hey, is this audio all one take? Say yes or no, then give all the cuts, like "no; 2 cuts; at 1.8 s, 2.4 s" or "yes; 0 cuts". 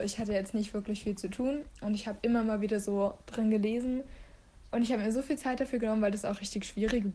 yes; 0 cuts